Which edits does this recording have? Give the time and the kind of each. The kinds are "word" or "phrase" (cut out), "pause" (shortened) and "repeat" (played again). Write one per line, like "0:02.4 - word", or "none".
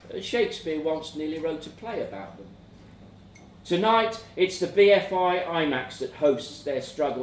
none